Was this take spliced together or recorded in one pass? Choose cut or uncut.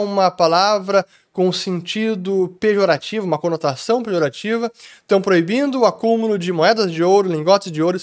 uncut